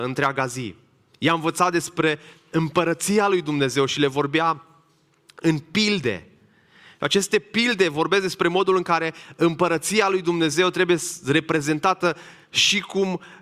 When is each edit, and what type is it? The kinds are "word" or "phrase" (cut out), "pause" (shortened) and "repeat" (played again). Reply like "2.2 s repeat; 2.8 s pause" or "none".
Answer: none